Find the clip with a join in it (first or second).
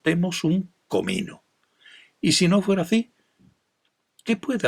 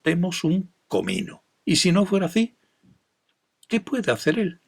second